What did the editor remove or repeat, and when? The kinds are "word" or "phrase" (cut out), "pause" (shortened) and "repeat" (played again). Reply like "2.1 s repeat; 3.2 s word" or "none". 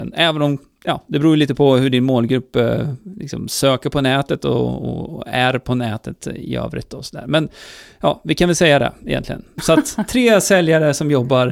none